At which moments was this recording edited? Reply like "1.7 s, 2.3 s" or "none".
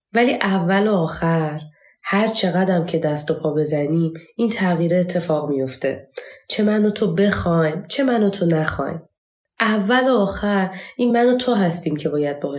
none